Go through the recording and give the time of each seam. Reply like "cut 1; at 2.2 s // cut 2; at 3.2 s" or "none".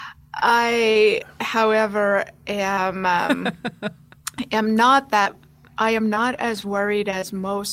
none